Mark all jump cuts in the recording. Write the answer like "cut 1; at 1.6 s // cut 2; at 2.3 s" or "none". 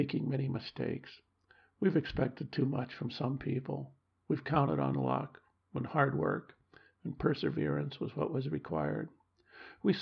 none